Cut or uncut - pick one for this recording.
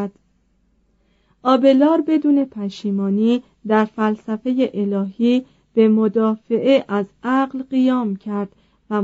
uncut